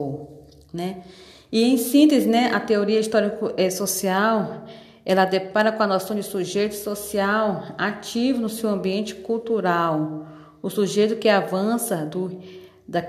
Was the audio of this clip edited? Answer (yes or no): no